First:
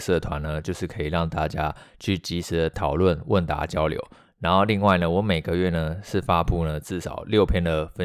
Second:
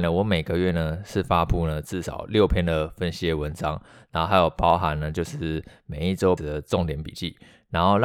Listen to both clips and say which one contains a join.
second; 1 cut; at 6.4 s

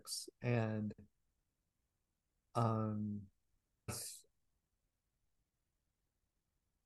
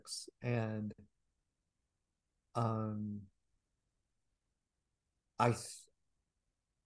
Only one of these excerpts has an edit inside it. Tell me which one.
first; 1 cut; at 3.9 s

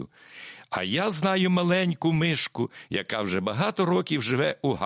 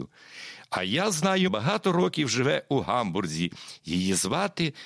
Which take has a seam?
second; 1 cut; at 1.5 s

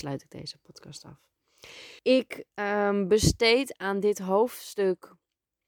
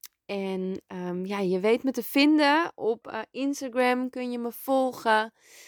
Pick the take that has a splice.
first; 1 cut; at 2.0 s

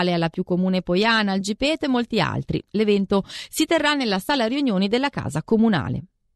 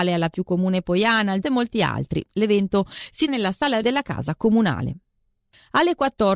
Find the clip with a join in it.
second; 3 cuts; at 1.4 s, 3.3 s, 3.8 s

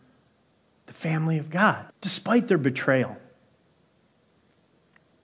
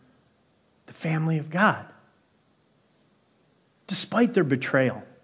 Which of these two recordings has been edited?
first; 1 cut; at 1.9 s

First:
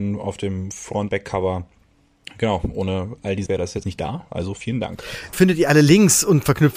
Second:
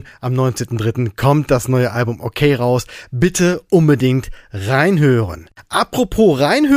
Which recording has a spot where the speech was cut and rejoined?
first; 4 cuts; at 1.1 s, 3.5 s, 3.8 s, 5.3 s

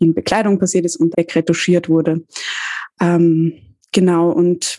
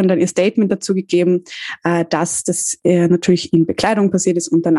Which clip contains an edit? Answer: first; 1 cut; at 1.1 s

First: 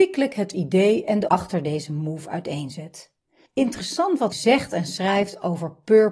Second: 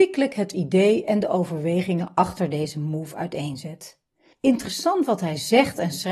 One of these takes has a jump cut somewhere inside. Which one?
first; 2 cuts; at 1.3 s, 4.3 s

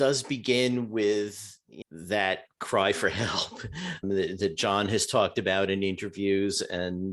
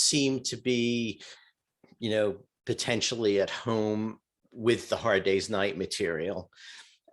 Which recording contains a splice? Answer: first; 2 cuts; at 1.8 s, 4.0 s

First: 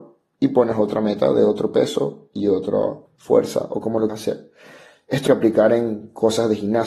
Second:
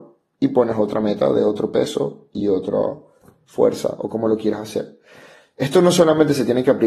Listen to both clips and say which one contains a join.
first; 3 cuts; at 3.1 s, 4.1 s, 5.3 s

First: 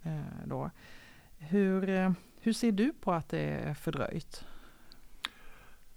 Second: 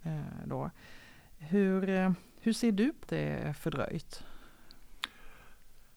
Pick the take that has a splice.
second; 1 cut; at 3.0 s

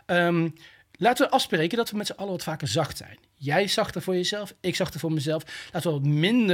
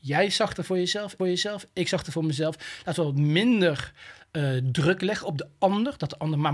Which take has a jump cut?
second; 1 cut; at 1.2 s

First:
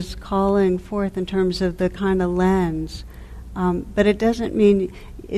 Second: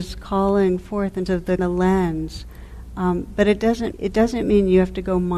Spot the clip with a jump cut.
second; 3 cuts; at 1.3 s, 1.6 s, 3.9 s

